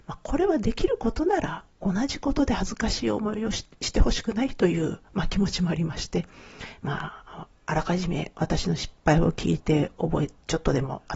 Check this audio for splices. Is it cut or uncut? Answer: cut